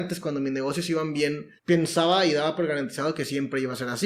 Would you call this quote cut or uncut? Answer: cut